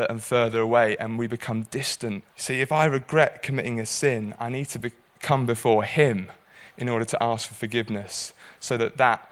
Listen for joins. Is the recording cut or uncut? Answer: cut